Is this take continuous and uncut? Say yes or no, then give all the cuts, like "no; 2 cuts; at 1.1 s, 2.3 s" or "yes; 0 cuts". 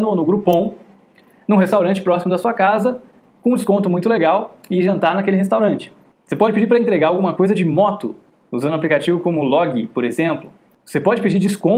yes; 0 cuts